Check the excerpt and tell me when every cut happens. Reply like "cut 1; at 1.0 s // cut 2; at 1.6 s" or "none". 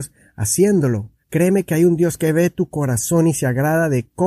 cut 1; at 1.2 s